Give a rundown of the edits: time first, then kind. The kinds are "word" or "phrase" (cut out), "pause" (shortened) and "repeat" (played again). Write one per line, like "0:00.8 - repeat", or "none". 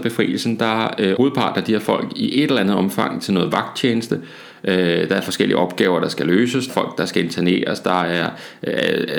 0:01.2 - word
0:06.7 - word